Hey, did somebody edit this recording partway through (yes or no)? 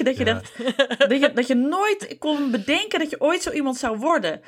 no